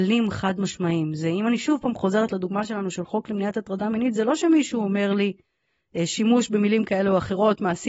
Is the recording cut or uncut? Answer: uncut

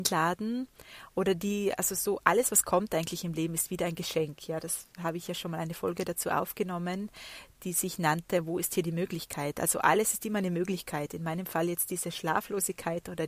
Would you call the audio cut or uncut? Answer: uncut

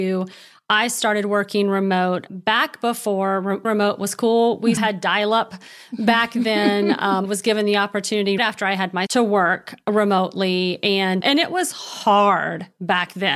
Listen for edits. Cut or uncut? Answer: cut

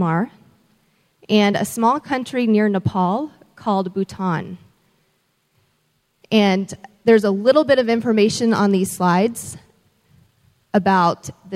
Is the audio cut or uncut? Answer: uncut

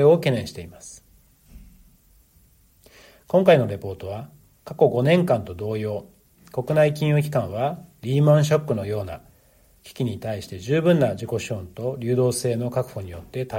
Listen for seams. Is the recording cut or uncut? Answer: uncut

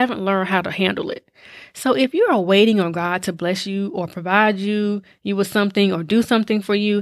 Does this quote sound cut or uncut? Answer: uncut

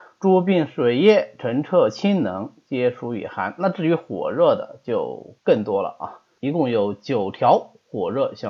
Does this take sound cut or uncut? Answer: cut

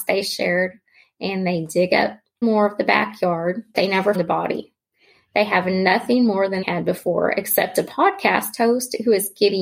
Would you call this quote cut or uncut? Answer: cut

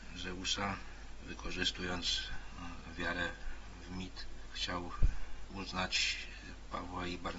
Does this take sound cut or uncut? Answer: uncut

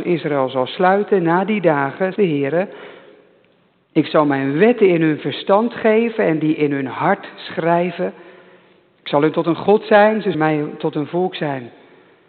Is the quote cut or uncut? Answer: cut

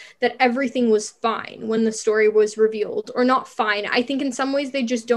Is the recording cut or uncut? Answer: uncut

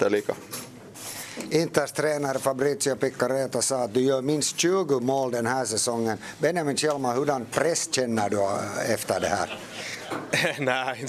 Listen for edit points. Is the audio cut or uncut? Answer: uncut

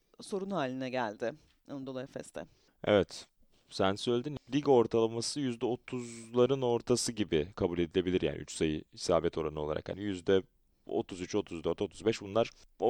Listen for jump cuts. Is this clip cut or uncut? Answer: uncut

